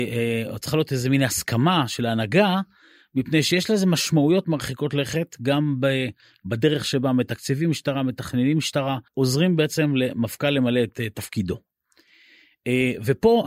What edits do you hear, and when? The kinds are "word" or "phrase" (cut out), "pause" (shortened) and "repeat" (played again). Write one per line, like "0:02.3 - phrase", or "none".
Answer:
0:09.1 - pause